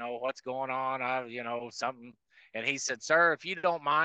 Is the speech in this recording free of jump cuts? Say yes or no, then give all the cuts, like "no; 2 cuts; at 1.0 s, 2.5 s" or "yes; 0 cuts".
yes; 0 cuts